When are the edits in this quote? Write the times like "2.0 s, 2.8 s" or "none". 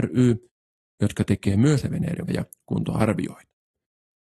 1.8 s, 2.3 s